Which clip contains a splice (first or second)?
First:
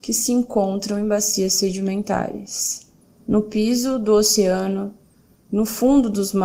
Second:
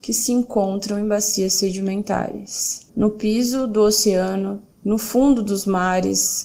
second